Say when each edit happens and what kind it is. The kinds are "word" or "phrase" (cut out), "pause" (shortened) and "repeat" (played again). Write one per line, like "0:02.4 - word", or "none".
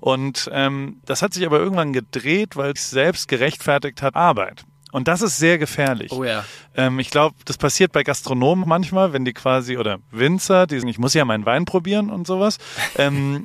0:02.8 - word
0:04.1 - word
0:08.6 - word
0:10.8 - word